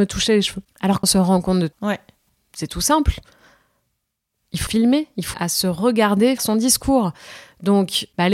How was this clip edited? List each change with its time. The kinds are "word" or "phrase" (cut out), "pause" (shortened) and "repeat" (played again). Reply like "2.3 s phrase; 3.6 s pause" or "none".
1.0 s word; 1.7 s word; 4.7 s word; 5.3 s word; 6.4 s word